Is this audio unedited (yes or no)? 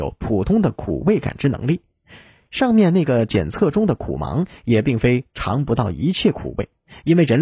yes